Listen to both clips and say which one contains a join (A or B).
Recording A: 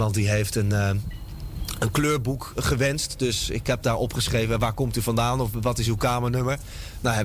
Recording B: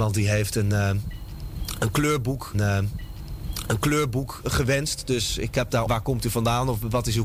B